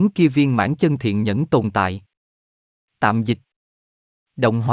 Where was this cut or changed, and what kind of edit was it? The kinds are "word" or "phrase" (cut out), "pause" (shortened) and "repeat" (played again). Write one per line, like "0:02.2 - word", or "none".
none